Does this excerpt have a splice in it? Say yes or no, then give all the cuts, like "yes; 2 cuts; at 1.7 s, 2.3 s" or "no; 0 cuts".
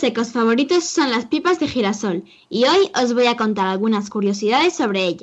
no; 0 cuts